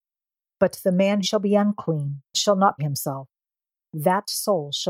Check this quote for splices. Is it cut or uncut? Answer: cut